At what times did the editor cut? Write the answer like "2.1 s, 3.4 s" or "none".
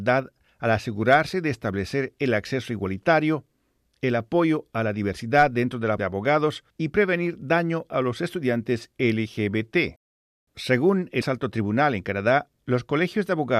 6.0 s, 6.7 s, 11.2 s